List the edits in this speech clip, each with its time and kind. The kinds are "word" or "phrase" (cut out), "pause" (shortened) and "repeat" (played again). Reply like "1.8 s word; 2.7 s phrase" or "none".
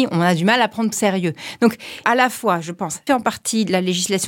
0.9 s phrase; 2.0 s phrase; 3.1 s word